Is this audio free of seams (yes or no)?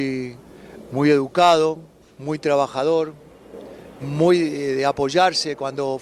no